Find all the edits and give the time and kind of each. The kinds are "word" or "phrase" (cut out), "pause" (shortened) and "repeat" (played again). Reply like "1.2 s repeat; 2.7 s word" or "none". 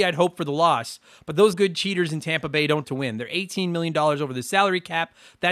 1.5 s word; 2.8 s word